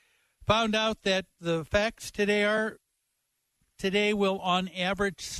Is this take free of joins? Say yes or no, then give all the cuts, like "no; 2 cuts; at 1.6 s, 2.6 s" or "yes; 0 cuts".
no; 2 cuts; at 1.4 s, 3.8 s